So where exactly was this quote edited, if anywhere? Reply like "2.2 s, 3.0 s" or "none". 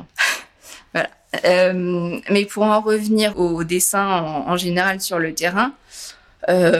3.3 s